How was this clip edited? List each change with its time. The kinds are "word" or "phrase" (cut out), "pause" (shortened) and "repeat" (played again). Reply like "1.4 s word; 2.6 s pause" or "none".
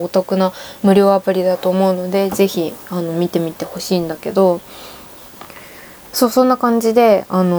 none